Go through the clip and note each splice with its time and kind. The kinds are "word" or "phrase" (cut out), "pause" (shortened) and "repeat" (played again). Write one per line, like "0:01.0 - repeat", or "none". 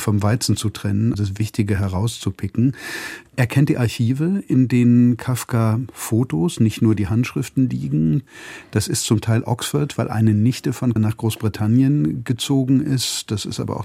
0:01.1 - word
0:11.0 - word

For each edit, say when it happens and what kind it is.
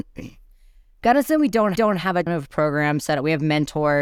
0:01.8 - repeat
0:02.3 - word

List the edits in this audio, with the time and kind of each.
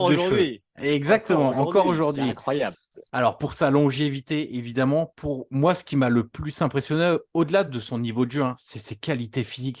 none

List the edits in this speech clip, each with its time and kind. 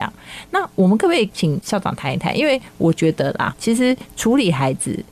0:03.5 - word

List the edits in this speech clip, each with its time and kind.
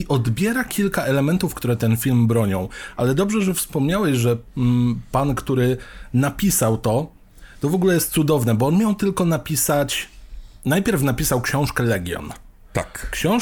none

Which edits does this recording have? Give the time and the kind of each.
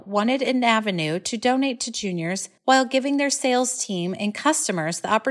0:02.6 - pause

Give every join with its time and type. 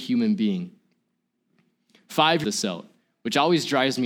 0:02.4 - phrase

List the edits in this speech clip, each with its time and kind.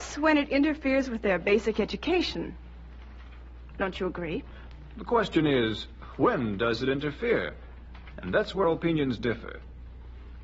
0:08.6 - word

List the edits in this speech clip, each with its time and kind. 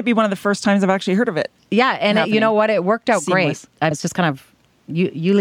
0:03.9 - word

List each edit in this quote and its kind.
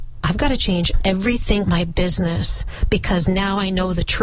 0:01.6 - word

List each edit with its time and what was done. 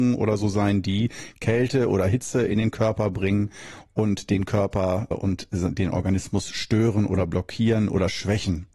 0:05.1 - word

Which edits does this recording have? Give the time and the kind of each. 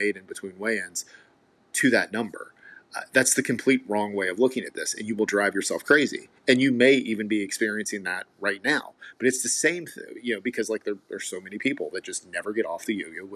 none

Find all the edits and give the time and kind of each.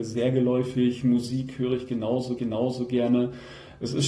0:02.4 - repeat

